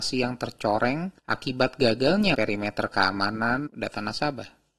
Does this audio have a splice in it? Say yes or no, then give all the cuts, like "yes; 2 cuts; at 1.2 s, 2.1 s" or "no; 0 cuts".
yes; 3 cuts; at 1.2 s, 2.3 s, 3.7 s